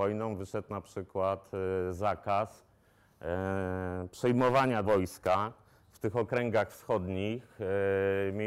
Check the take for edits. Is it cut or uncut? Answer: cut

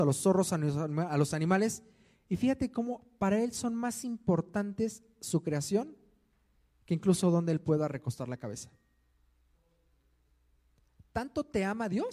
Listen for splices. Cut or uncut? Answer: uncut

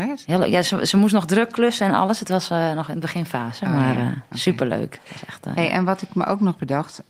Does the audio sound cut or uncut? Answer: uncut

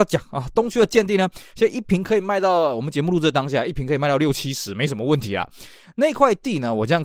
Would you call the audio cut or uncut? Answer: uncut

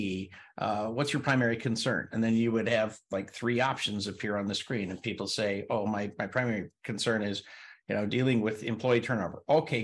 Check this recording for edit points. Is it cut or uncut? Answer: uncut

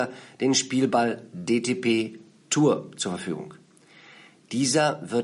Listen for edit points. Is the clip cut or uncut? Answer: uncut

